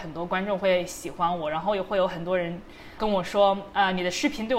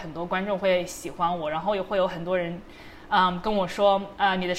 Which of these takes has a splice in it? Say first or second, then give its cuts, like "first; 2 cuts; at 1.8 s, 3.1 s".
first; 1 cut; at 3.0 s